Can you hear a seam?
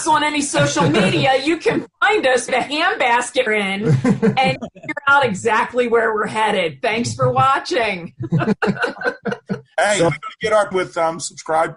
yes; 5 cuts; at 2.5 s, 3.5 s, 4.6 s, 10.1 s, 10.7 s

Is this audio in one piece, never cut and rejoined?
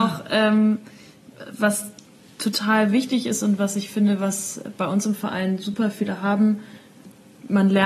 yes; 0 cuts

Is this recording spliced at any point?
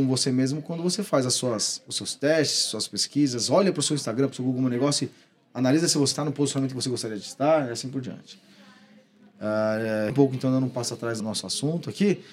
yes; 3 cuts; at 6.1 s, 10.1 s, 11.2 s

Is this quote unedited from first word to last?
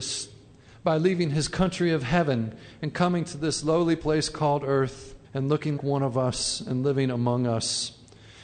no; 2 cuts; at 5.2 s, 5.8 s

